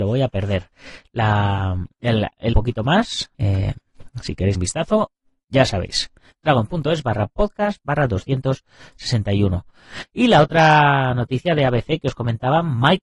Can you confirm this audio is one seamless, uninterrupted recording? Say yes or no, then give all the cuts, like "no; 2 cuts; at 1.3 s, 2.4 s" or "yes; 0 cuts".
no; 3 cuts; at 2.5 s, 3.3 s, 4.5 s